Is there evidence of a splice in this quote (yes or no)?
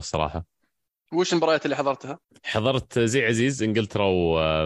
yes